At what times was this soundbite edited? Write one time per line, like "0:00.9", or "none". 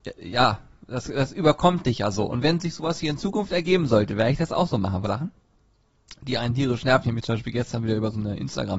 0:05.0